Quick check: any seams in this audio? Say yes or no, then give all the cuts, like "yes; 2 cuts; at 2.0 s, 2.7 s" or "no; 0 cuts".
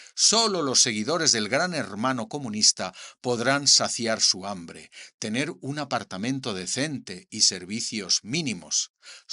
no; 0 cuts